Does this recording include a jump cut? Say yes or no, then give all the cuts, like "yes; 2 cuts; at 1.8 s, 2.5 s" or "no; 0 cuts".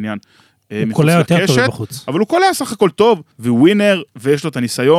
yes; 1 cut; at 3.3 s